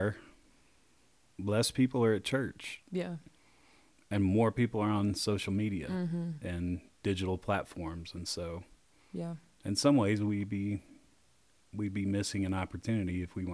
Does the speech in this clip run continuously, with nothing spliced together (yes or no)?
yes